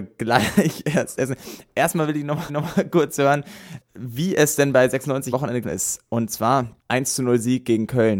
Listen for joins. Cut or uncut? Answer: cut